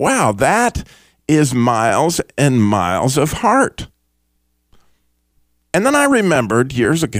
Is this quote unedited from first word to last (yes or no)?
yes